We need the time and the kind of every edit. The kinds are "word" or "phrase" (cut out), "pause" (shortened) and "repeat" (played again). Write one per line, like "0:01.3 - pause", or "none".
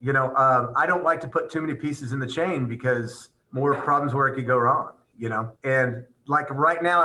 0:03.4 - pause
0:05.6 - pause

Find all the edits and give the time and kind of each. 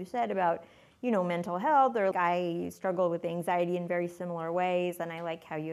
0:02.1 - word

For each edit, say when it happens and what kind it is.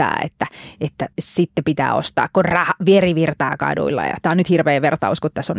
0:01.1 - pause

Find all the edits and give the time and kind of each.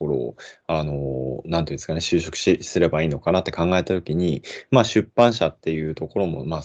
none

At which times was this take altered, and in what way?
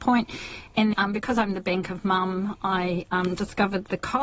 0:00.9 - word

